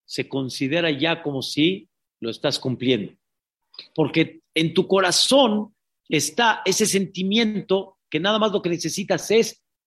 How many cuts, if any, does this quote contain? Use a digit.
0